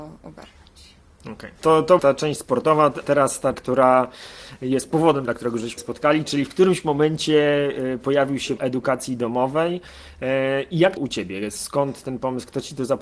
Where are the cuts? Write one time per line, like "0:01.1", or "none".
0:02.0
0:03.0
0:03.5
0:05.8
0:08.6
0:11.0